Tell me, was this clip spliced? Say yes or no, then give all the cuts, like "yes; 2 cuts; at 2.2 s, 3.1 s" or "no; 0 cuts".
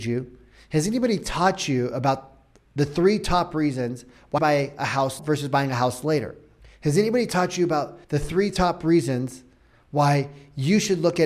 yes; 3 cuts; at 4.4 s, 5.2 s, 8.0 s